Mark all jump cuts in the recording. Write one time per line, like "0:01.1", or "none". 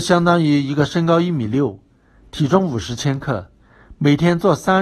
none